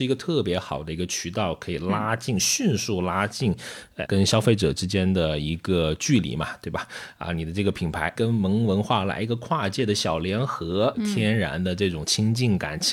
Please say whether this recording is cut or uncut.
cut